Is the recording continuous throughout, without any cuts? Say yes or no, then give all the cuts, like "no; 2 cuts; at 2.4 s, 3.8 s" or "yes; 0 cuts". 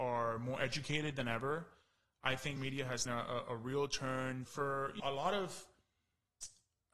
no; 4 cuts; at 2.6 s, 3.1 s, 4.5 s, 5.0 s